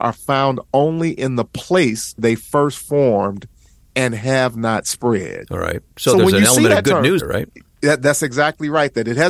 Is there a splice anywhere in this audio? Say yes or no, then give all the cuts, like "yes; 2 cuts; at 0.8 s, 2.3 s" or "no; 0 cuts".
yes; 2 cuts; at 2.2 s, 7.2 s